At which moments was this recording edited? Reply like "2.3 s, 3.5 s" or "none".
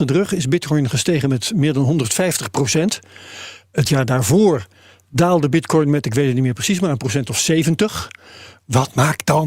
none